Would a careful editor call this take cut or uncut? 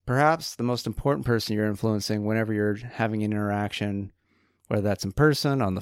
uncut